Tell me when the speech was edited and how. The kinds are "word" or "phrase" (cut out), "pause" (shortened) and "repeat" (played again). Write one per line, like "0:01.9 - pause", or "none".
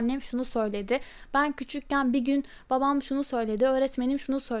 none